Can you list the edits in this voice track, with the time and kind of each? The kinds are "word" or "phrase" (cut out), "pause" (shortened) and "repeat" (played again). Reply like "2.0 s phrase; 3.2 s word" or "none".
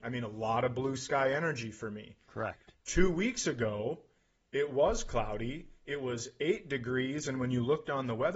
none

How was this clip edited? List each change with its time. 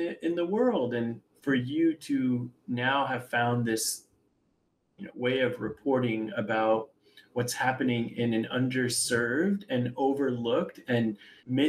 none

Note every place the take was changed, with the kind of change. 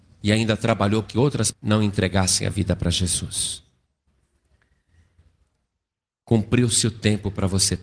1.0 s word; 1.5 s word

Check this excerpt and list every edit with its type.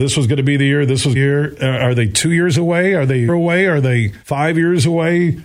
1.1 s phrase; 3.3 s word; 4.2 s pause

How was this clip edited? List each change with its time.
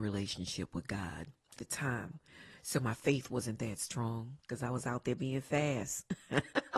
1.6 s word

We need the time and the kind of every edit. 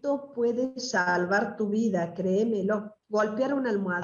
3.0 s pause

